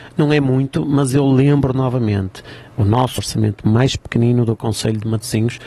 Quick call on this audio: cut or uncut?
cut